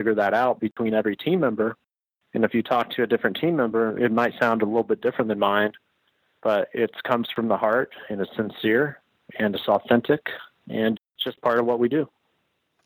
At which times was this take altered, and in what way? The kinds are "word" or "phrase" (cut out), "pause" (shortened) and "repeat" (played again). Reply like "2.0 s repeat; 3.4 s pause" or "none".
11.0 s word